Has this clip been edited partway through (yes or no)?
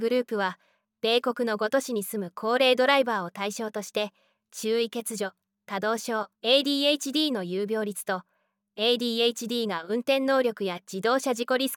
yes